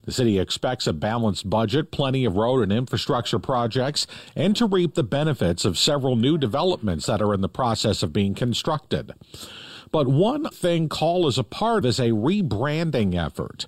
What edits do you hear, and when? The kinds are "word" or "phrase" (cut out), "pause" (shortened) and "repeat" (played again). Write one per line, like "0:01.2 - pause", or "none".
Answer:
0:10.5 - word
0:11.8 - word